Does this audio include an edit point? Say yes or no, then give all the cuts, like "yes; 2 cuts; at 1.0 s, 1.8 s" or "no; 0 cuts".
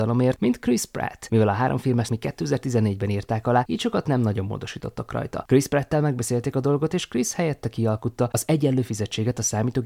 yes; 1 cut; at 2.1 s